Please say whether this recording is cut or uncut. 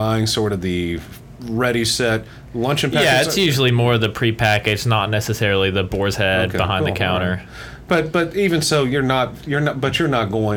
uncut